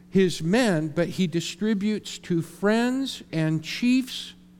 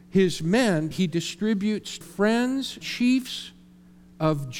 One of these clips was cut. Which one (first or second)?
second